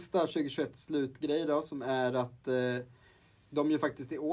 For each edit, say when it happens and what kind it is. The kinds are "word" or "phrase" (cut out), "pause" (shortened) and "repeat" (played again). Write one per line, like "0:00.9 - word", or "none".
none